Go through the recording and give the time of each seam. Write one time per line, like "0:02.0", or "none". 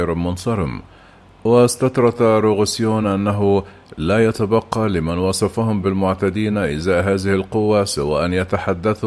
none